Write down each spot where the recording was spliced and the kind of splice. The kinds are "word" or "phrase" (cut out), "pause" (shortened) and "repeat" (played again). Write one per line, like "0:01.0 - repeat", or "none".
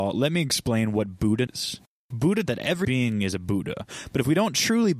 0:01.5 - word
0:02.5 - word
0:02.8 - word